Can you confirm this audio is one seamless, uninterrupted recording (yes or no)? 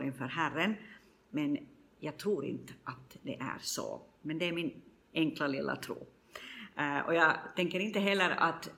yes